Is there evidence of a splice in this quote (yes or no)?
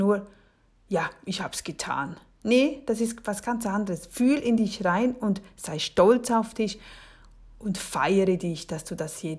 no